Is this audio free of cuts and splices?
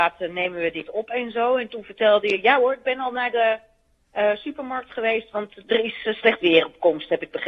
yes; 0 cuts

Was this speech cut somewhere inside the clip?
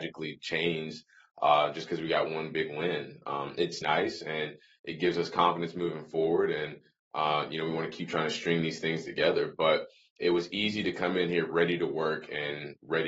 yes; 1 cut; at 3.8 s

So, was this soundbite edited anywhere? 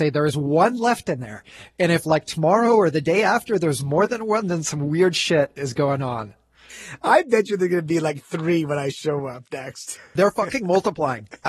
no; 0 cuts

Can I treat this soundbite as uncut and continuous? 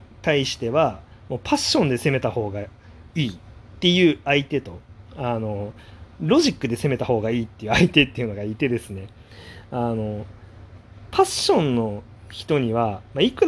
no; 2 cuts; at 3.1 s, 5.1 s

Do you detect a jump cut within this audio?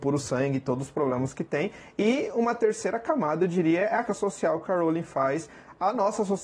yes; 1 cut; at 4.0 s

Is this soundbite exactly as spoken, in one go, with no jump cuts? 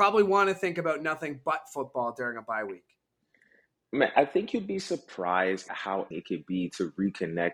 no; 3 cuts; at 4.1 s, 5.7 s, 6.1 s

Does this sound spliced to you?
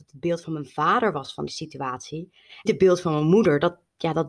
yes; 2 cuts; at 1.5 s, 2.7 s

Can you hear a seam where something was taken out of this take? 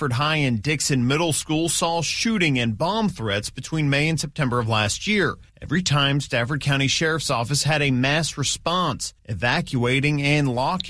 yes; 1 cut; at 9.2 s

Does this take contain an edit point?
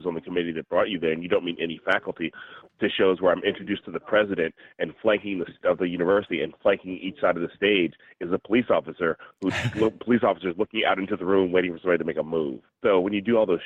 no; 0 cuts

